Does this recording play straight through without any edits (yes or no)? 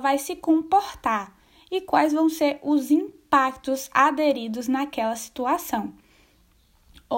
yes